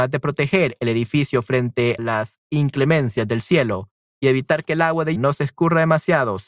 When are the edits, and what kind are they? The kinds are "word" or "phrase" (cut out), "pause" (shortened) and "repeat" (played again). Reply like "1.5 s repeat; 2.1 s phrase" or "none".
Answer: 2.0 s word; 5.2 s word